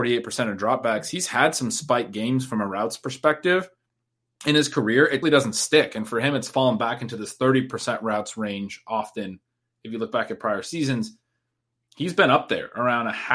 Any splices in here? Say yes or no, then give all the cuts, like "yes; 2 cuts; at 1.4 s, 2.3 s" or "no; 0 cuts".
yes; 1 cut; at 5.2 s